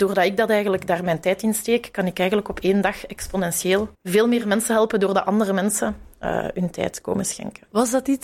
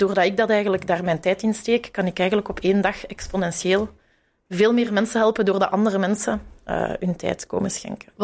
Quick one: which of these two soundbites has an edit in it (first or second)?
first